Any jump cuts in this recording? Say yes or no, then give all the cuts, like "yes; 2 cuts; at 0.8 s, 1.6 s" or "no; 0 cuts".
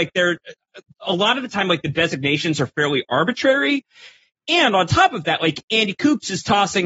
no; 0 cuts